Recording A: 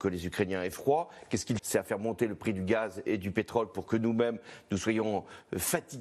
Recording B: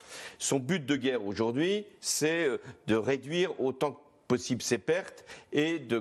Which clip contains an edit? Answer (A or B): A